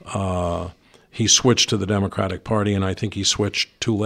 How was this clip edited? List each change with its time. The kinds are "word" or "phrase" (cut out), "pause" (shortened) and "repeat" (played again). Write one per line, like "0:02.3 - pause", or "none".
none

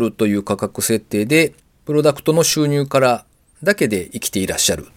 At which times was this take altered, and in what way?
none

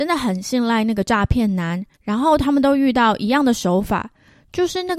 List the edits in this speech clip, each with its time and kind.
0:01.9 - pause

